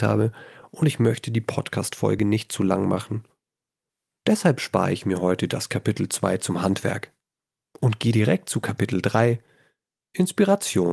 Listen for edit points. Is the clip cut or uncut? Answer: uncut